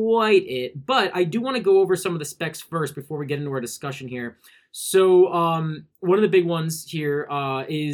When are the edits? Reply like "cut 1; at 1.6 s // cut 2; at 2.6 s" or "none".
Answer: none